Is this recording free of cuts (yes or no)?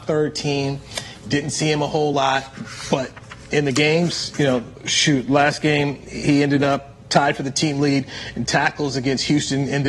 yes